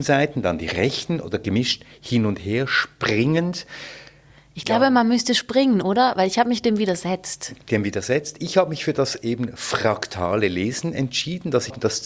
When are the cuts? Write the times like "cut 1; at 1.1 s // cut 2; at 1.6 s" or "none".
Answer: cut 1; at 7.7 s

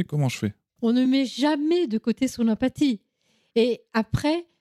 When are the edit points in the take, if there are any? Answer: none

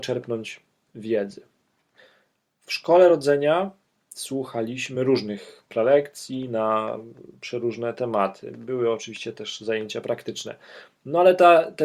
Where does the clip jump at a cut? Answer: none

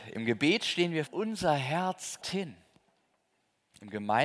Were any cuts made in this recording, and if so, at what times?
cut 1; at 1.1 s // cut 2; at 2.2 s

